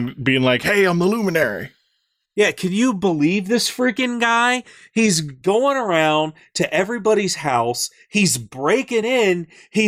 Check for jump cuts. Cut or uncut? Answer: uncut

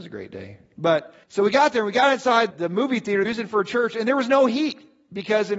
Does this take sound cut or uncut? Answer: cut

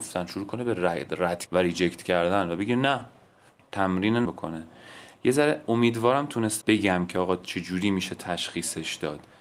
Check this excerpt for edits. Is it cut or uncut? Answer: cut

